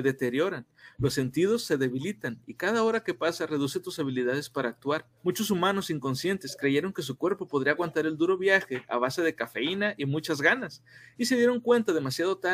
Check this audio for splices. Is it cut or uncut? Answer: cut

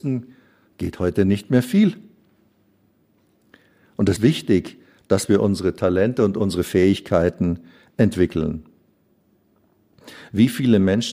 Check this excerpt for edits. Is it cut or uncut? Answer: cut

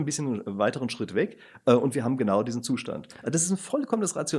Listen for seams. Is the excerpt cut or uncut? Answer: uncut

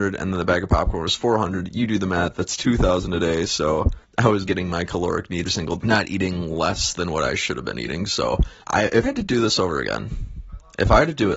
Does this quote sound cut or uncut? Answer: cut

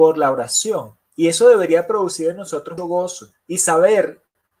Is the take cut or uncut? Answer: cut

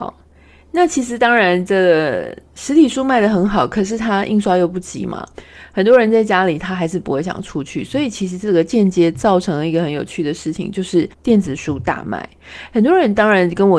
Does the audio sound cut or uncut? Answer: cut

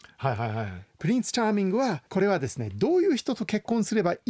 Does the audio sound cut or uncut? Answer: cut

